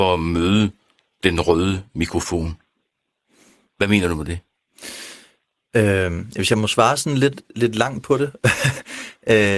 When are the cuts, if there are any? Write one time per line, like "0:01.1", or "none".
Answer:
none